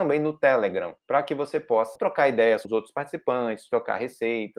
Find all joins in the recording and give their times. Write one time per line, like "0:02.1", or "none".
0:01.0
0:02.0
0:02.6